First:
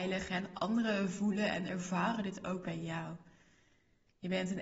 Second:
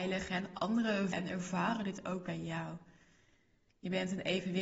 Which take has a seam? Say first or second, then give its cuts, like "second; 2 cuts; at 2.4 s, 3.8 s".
second; 1 cut; at 1.1 s